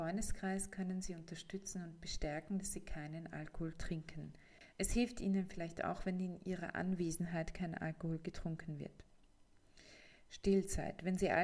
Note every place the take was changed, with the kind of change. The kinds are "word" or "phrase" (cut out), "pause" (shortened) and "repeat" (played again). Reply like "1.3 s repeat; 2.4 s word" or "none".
none